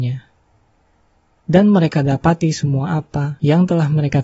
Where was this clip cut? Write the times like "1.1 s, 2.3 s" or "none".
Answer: none